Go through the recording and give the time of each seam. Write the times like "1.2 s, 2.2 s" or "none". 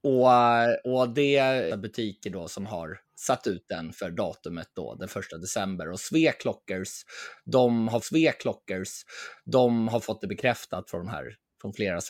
1.7 s, 3.0 s, 4.7 s, 8.0 s